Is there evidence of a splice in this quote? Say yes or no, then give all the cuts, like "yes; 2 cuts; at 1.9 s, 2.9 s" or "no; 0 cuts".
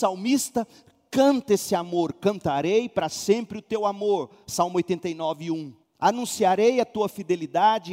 yes; 1 cut; at 5.8 s